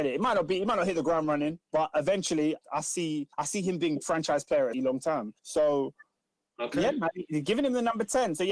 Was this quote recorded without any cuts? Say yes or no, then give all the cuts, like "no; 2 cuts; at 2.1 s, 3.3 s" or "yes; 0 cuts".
no; 5 cuts; at 1.6 s, 2.6 s, 3.3 s, 4.7 s, 5.4 s